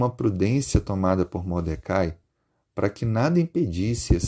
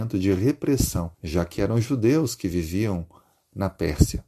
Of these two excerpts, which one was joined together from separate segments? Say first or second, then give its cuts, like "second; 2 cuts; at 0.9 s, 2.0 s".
second; 1 cut; at 1.1 s